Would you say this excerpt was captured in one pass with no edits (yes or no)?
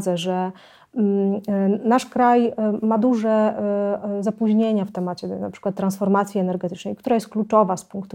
yes